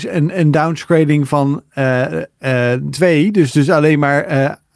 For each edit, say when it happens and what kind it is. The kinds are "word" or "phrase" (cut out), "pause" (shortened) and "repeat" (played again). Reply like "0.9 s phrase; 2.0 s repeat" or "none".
2.9 s word